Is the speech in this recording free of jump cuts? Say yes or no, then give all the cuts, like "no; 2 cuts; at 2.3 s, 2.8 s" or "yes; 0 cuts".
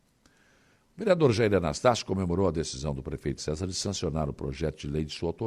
no; 1 cut; at 3.4 s